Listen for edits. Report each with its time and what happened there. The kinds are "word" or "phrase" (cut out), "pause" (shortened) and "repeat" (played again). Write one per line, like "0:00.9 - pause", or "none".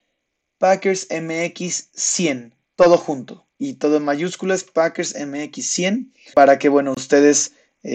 0:02.6 - pause
0:03.5 - pause
0:06.3 - word